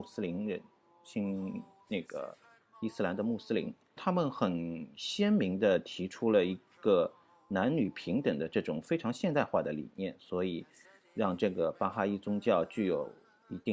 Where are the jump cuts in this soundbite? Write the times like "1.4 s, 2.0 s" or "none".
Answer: 4.0 s